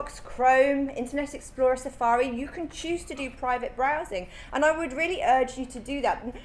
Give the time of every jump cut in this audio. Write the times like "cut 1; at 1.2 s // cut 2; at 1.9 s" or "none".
none